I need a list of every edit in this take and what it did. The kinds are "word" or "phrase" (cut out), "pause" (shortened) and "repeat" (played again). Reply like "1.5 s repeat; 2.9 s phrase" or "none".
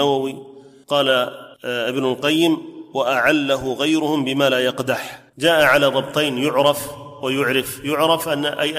1.5 s pause; 5.3 s pause